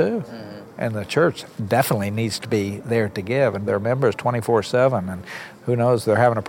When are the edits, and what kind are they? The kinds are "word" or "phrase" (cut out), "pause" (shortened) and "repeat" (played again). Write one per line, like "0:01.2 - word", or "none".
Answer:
0:03.7 - phrase

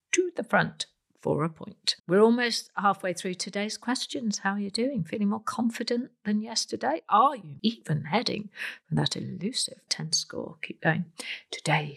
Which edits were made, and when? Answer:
0:02.0 - pause
0:07.6 - word
0:09.9 - word

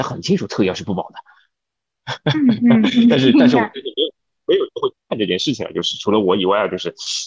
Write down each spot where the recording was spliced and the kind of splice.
none

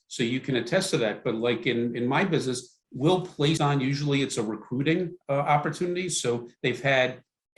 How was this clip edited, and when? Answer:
0:02.8 - pause
0:03.6 - phrase
0:05.2 - pause

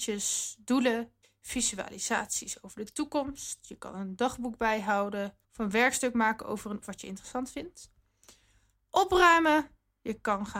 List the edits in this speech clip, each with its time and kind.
0:01.2 - pause
0:05.4 - pause
0:06.8 - word

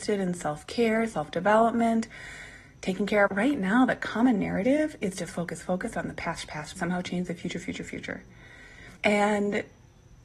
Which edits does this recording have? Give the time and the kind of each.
0:03.3 - phrase
0:05.3 - word
0:06.8 - phrase
0:09.0 - pause

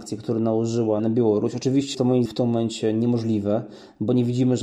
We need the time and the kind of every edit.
0:01.0 - word
0:01.9 - word
0:02.3 - word

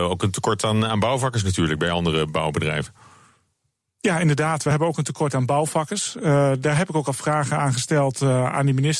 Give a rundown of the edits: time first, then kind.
none

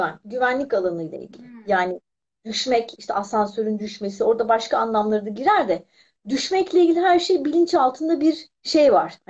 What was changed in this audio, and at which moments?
none

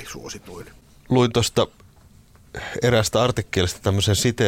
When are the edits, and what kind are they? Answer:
none

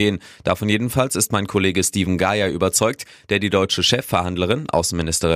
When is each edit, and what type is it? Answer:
none

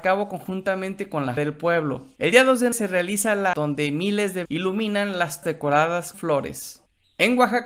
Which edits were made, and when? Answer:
0:01.4 - word
0:02.7 - word
0:03.5 - word
0:04.5 - word
0:05.4 - word
0:06.1 - word

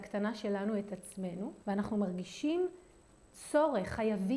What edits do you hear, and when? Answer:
0:01.6 - pause

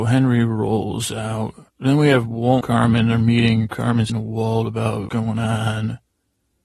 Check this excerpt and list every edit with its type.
0:01.7 - pause
0:02.6 - word
0:04.1 - word
0:05.1 - word

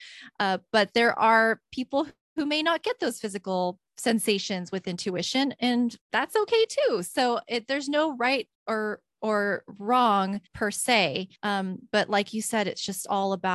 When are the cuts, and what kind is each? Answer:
0:06.0 - pause
0:08.5 - pause
0:10.5 - pause
0:11.4 - pause

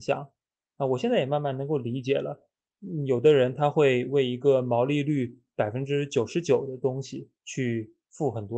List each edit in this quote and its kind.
0:07.4 - pause

